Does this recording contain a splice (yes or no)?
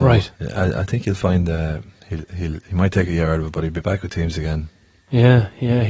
no